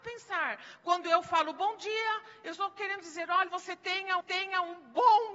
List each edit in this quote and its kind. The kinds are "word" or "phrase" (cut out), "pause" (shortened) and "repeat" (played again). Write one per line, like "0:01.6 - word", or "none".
0:03.5 - phrase
0:04.2 - repeat